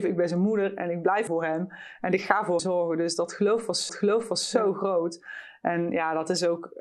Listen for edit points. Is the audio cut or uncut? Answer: cut